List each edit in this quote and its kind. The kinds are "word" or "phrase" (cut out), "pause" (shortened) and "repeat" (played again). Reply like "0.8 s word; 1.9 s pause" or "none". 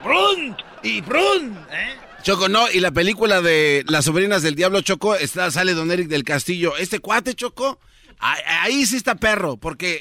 none